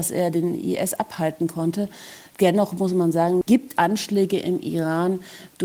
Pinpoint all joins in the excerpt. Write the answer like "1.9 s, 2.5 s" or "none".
3.8 s